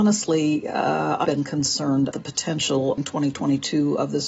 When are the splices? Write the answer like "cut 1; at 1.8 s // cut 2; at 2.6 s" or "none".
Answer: cut 1; at 1.2 s // cut 2; at 2.1 s // cut 3; at 3.0 s